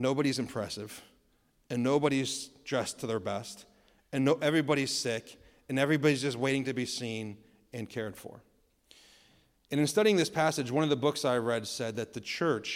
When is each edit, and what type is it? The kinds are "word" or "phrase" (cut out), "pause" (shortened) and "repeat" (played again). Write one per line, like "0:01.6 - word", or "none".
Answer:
none